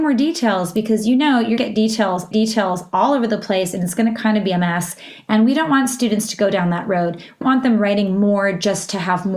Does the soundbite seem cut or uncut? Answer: cut